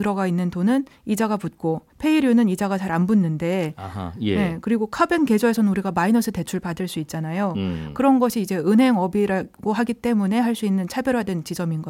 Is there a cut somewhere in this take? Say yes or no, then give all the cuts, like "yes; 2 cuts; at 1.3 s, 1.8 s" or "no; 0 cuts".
yes; 1 cut; at 1.9 s